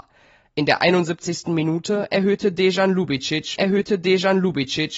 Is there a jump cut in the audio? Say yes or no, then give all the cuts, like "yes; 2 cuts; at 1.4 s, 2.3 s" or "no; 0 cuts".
yes; 1 cut; at 3.6 s